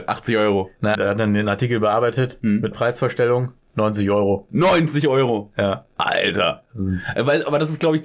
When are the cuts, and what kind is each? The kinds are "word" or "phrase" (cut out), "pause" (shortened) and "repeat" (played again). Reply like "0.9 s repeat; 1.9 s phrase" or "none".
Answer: 0.9 s word; 2.7 s word; 5.9 s pause